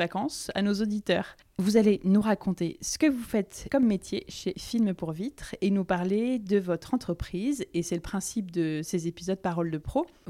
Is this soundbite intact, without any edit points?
yes; 0 cuts

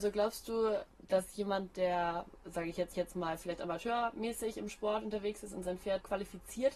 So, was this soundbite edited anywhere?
yes; 1 cut; at 2.9 s

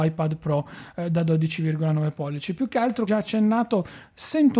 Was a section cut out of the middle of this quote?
yes; 1 cut; at 3.1 s

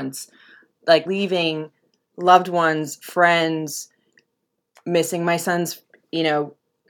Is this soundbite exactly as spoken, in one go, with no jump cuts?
no; 1 cut; at 1.1 s

